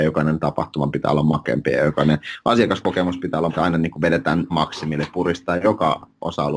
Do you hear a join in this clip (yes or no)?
yes